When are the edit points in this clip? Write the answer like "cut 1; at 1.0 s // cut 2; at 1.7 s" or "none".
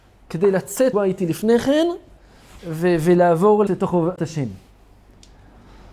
cut 1; at 0.9 s // cut 2; at 2.6 s // cut 3; at 3.7 s // cut 4; at 4.2 s